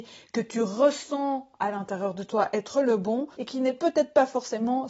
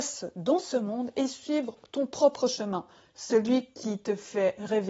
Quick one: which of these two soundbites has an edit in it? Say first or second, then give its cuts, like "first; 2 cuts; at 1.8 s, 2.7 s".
first; 1 cut; at 3.3 s